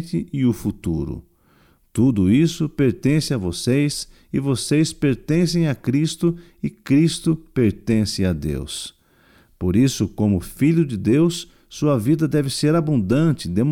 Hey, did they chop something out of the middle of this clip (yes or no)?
no